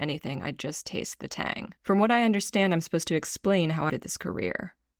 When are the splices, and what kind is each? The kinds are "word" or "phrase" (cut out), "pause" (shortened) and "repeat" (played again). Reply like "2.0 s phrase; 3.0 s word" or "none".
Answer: 1.8 s pause; 3.9 s word